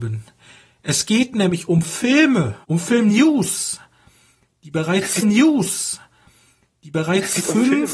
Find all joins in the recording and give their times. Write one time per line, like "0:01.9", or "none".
0:02.6
0:05.2